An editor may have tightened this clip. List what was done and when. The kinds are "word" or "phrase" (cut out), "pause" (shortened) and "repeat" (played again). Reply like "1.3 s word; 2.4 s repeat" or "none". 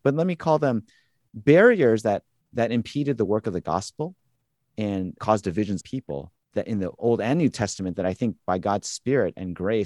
2.4 s pause; 5.2 s word; 5.8 s word